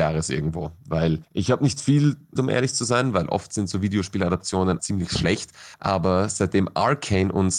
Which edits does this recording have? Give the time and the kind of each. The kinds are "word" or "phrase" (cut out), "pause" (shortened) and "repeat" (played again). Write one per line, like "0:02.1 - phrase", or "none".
0:01.2 - pause
0:02.4 - word
0:04.8 - word
0:05.7 - pause